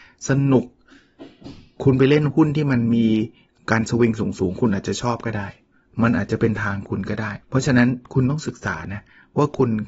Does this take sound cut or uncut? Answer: cut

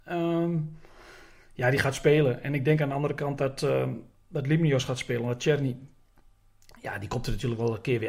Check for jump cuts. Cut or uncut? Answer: uncut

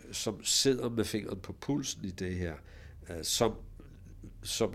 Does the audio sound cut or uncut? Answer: uncut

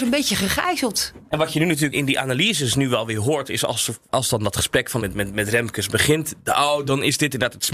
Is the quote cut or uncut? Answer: cut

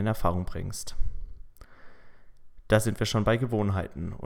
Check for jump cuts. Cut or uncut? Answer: uncut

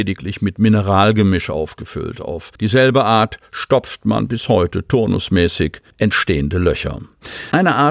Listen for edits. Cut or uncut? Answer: cut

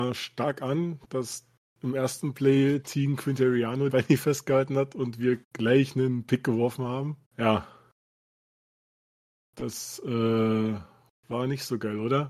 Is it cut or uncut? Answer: cut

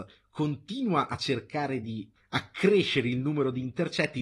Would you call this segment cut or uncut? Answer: uncut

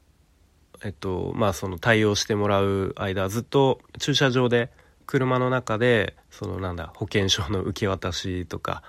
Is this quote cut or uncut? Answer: cut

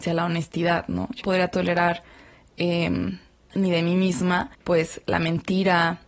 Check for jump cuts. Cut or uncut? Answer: cut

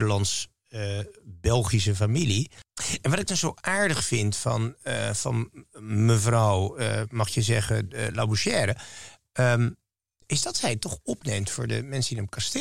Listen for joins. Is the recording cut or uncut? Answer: uncut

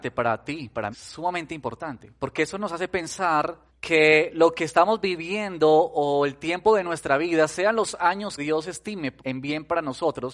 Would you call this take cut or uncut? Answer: cut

